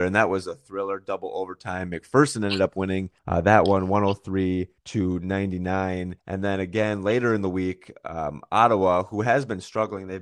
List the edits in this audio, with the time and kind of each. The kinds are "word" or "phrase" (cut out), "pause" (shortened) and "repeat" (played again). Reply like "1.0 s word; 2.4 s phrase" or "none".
3.2 s pause; 4.8 s pause; 6.2 s pause